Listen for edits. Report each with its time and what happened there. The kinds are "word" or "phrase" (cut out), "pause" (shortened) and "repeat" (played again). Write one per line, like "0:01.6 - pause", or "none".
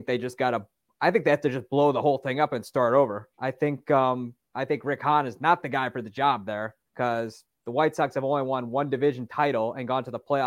0:03.3 - pause
0:06.9 - pause